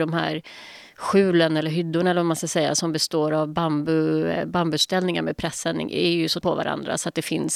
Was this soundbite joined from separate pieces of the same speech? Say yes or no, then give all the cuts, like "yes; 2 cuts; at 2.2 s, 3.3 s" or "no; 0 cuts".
yes; 1 cut; at 6.4 s